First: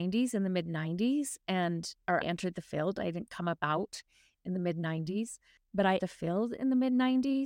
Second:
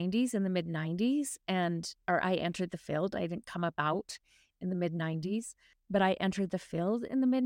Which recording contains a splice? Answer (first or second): first